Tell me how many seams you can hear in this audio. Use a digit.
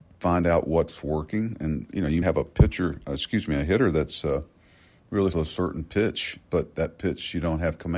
3